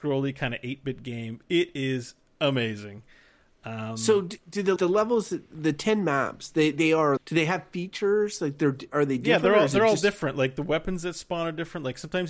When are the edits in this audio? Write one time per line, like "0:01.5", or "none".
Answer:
0:04.8
0:07.2